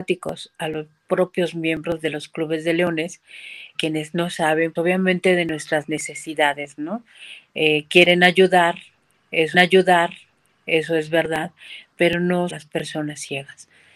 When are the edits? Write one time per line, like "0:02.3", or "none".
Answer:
0:03.7
0:04.8
0:09.5
0:12.5

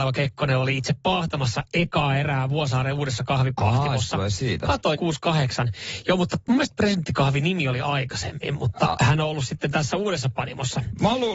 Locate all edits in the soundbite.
0:05.0

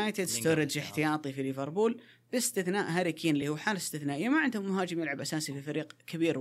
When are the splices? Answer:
none

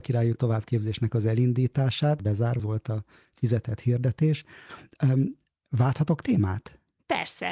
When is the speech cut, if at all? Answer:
0:02.2
0:02.6

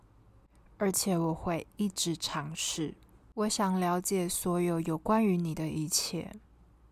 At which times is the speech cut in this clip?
0:03.2

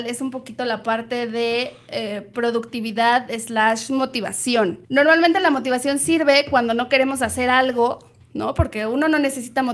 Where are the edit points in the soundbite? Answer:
0:04.8

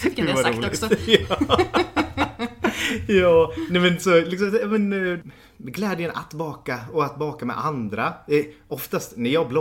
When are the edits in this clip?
none

